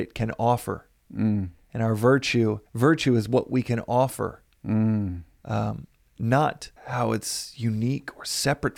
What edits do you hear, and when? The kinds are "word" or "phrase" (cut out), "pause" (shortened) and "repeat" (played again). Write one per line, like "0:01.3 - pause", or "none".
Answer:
0:02.7 - pause
0:06.8 - pause